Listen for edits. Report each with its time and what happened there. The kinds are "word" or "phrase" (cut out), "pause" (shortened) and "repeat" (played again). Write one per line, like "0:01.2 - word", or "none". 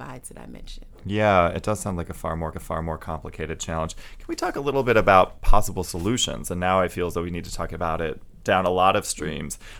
0:02.5 - repeat